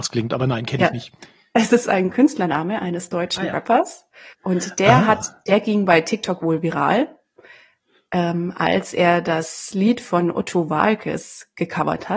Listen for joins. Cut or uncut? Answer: cut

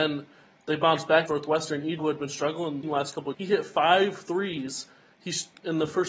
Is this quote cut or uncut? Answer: cut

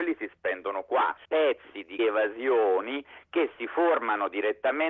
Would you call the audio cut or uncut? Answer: cut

